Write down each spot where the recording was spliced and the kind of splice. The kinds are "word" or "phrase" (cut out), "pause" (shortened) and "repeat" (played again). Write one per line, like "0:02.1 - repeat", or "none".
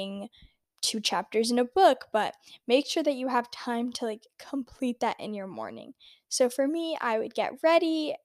none